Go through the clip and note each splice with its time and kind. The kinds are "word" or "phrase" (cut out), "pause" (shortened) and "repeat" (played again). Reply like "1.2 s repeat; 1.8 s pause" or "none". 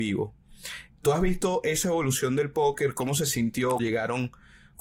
3.8 s word